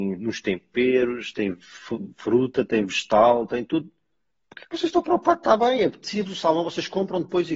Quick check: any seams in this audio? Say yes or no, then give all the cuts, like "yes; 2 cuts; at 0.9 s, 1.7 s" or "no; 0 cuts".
no; 0 cuts